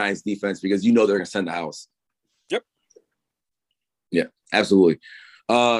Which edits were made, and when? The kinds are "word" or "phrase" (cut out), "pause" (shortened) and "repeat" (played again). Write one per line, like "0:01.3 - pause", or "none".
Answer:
none

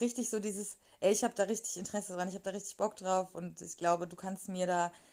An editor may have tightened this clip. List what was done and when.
none

